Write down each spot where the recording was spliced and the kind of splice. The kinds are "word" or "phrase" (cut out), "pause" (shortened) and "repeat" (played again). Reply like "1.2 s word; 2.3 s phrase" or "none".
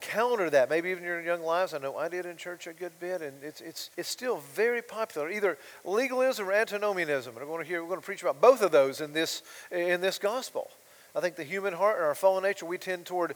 3.9 s pause